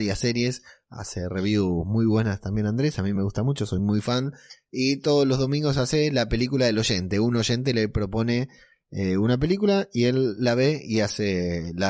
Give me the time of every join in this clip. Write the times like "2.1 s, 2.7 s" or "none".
none